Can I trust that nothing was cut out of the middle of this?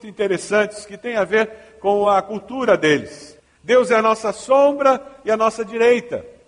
yes; 0 cuts

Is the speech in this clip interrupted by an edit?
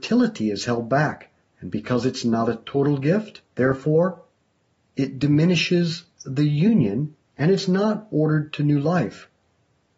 yes; 3 cuts; at 1.4 s, 3.5 s, 7.2 s

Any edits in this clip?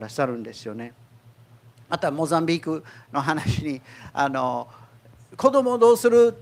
no; 0 cuts

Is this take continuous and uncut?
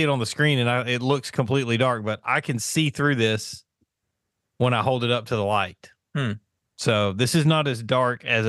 yes; 0 cuts

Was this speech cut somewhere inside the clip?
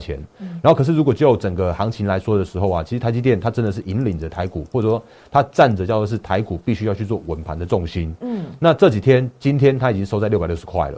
no; 0 cuts

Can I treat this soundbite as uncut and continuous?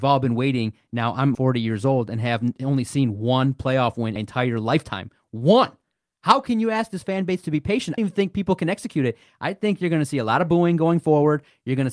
no; 3 cuts; at 1.3 s, 4.2 s, 8.0 s

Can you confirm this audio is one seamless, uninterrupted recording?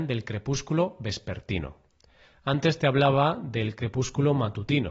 yes; 0 cuts

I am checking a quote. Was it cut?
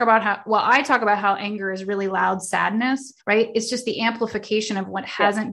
yes; 1 cut; at 3.2 s

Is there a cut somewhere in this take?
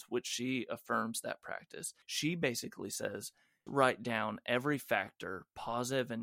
yes; 2 cuts; at 2.0 s, 3.7 s

